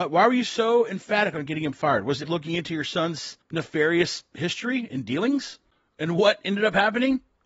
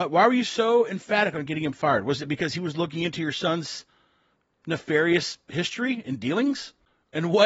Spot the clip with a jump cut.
first; 2 cuts; at 2.2 s, 3.4 s

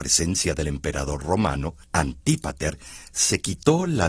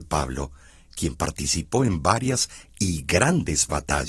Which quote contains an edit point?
first; 1 cut; at 1.8 s

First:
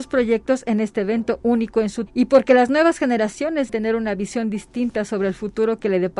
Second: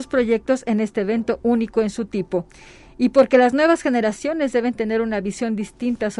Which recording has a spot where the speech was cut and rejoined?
first; 2 cuts; at 2.1 s, 3.7 s

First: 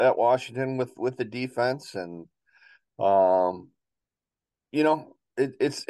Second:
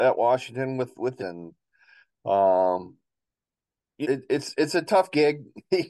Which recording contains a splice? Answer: second; 2 cuts; at 1.2 s, 4.0 s

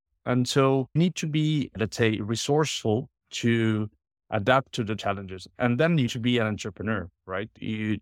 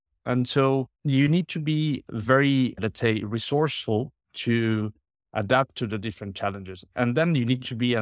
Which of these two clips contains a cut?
first; 4 cuts; at 1.0 s, 1.7 s, 5.0 s, 6.1 s

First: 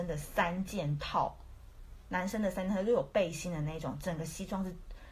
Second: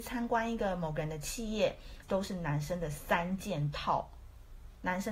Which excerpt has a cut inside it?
second; 1 cut; at 2.0 s

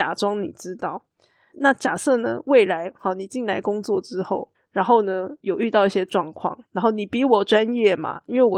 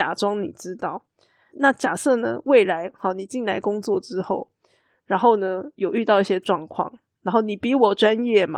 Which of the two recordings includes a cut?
first; 2 cuts; at 4.5 s, 6.7 s

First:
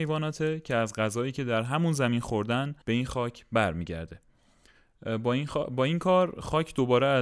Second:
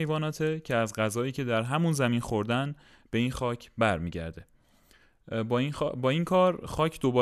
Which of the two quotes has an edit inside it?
first; 1 cut; at 2.8 s

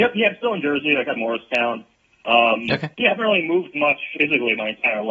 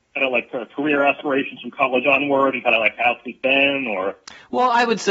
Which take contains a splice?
first; 3 cuts; at 1.2 s, 2.9 s, 4.2 s

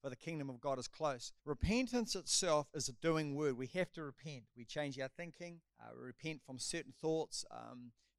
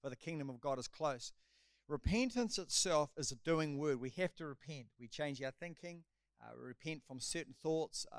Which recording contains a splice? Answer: first; 2 cuts; at 1.4 s, 5.7 s

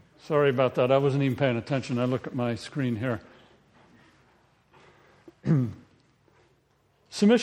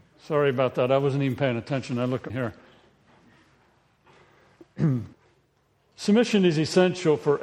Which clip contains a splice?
second; 2 cuts; at 2.3 s, 5.1 s

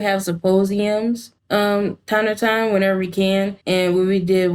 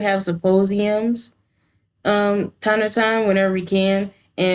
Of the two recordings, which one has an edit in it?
first; 2 cuts; at 1.4 s, 3.6 s

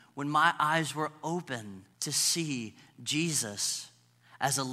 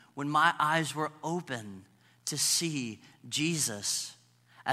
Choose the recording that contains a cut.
first; 1 cut; at 1.9 s

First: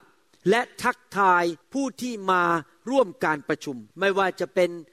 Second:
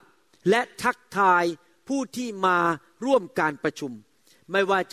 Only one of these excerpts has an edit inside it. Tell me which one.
first; 2 cuts; at 1.6 s, 3.9 s

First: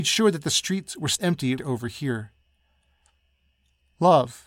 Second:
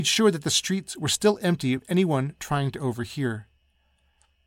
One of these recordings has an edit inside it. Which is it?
first; 2 cuts; at 1.2 s, 1.6 s

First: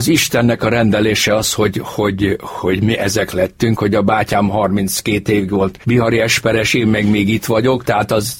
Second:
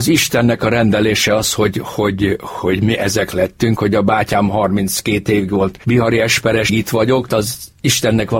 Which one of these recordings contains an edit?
second; 2 cuts; at 6.7 s, 7.3 s

